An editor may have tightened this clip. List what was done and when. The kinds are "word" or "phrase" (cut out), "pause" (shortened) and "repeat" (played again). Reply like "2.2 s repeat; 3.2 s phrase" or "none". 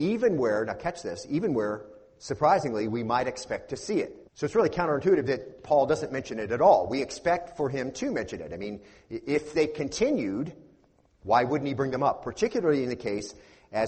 4.3 s pause